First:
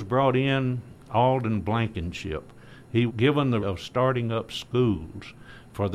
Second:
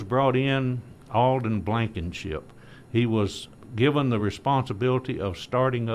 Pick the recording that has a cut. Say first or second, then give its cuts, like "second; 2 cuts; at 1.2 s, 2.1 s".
first; 2 cuts; at 3.1 s, 3.6 s